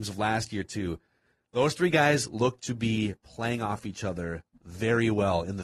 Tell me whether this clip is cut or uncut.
uncut